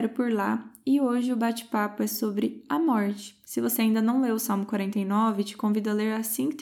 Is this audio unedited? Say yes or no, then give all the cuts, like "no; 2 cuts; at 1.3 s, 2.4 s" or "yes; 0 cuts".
yes; 0 cuts